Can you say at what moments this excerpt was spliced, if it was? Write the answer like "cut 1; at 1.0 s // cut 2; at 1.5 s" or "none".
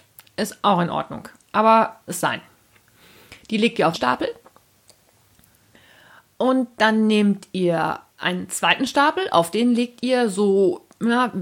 cut 1; at 2.1 s // cut 2; at 3.9 s // cut 3; at 8.1 s